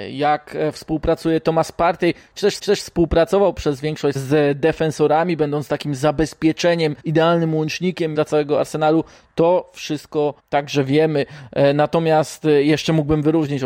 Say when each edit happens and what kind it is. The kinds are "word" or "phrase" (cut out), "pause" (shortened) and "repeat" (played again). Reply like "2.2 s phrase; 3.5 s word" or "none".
2.6 s repeat; 4.2 s word; 7.0 s pause; 8.1 s phrase; 10.4 s pause